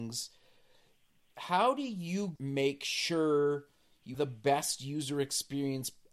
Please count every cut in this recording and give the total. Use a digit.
2